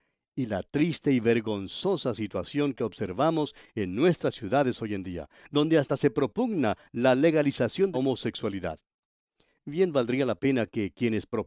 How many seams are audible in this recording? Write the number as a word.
one